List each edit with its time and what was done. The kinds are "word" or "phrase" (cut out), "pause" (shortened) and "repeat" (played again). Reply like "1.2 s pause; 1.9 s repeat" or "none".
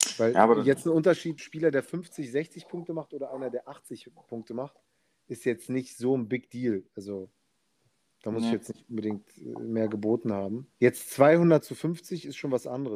1.4 s word; 6.9 s pause; 10.7 s pause